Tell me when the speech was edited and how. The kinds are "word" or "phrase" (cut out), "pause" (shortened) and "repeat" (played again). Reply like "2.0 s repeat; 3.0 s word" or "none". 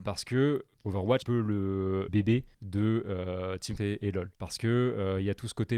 1.2 s phrase; 2.1 s word; 2.5 s pause; 3.8 s word; 4.4 s pause